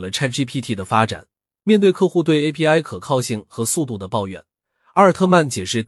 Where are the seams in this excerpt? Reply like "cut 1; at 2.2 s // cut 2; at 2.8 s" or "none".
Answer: none